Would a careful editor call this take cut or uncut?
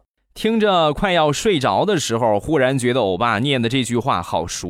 uncut